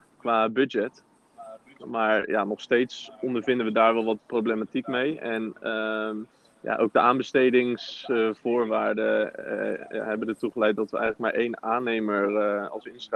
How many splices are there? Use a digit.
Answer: 1